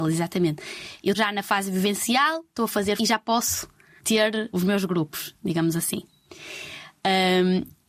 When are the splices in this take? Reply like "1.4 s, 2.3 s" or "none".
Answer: 1.1 s, 3.0 s, 4.0 s, 4.5 s